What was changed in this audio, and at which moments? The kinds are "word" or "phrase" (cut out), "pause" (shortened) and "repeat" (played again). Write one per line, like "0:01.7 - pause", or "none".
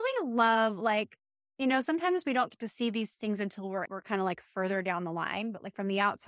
0:03.8 - word